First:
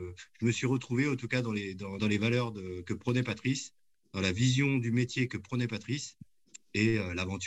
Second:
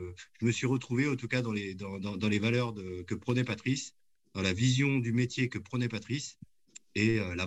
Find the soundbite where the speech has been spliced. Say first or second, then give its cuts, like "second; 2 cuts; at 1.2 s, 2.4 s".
first; 1 cut; at 2.0 s